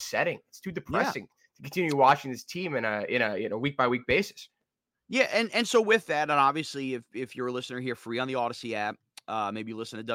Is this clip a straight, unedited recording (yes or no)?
yes